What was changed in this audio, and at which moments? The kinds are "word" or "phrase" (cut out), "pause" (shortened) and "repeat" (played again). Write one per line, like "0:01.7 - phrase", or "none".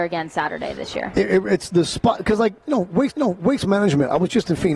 0:03.1 - repeat